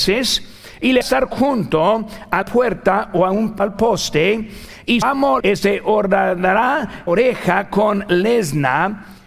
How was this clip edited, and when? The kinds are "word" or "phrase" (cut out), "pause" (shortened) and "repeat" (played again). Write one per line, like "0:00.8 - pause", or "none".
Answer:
0:01.0 - word
0:02.4 - word
0:03.6 - word
0:05.0 - word
0:05.4 - word
0:07.1 - word